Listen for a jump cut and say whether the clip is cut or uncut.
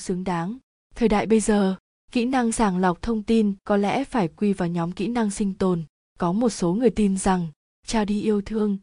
uncut